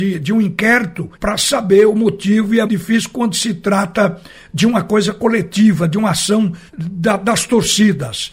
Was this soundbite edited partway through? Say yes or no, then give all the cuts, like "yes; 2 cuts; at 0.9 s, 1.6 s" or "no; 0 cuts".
yes; 3 cuts; at 1.1 s, 2.7 s, 6.7 s